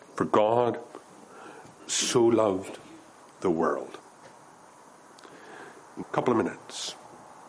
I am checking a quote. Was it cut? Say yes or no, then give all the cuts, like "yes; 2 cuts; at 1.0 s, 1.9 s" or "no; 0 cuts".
yes; 1 cut; at 6.0 s